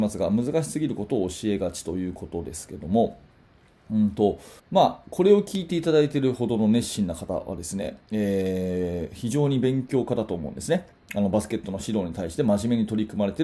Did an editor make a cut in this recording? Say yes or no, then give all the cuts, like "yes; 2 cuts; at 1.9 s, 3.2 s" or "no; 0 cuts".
yes; 1 cut; at 4.6 s